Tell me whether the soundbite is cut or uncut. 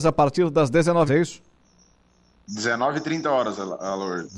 cut